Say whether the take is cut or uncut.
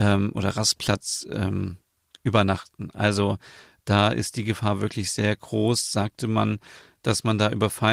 uncut